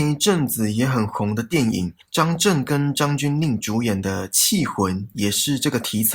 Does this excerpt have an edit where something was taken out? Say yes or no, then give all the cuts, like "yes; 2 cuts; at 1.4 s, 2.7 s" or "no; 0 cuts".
yes; 1 cut; at 2.0 s